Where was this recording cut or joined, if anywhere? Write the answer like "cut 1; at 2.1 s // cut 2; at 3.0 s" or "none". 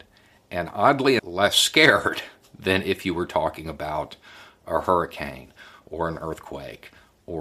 cut 1; at 1.2 s

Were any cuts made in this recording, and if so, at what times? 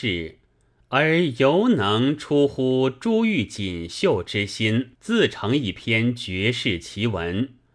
cut 1; at 4.9 s

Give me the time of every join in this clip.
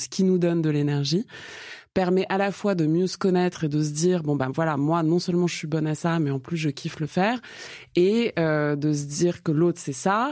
none

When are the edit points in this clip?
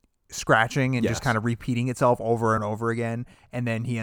cut 1; at 2.6 s

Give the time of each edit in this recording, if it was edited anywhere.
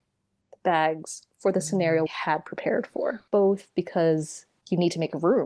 cut 1; at 2.1 s // cut 2; at 3.3 s

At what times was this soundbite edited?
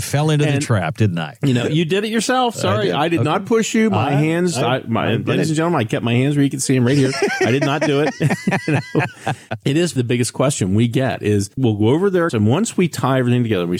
cut 1; at 10.0 s // cut 2; at 11.5 s // cut 3; at 12.3 s

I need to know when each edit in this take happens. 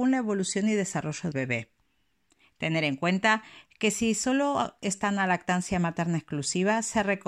cut 1; at 1.3 s

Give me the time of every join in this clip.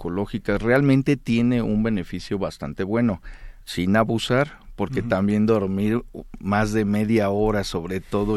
cut 1; at 3.6 s

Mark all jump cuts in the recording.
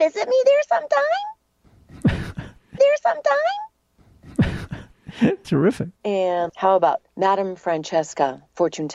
cut 1; at 2.8 s // cut 2; at 5.4 s // cut 3; at 6.0 s // cut 4; at 7.1 s

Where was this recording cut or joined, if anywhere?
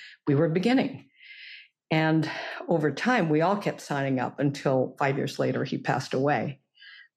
none

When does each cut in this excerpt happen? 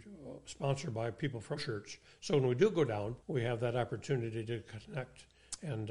cut 1; at 1.6 s // cut 2; at 3.2 s

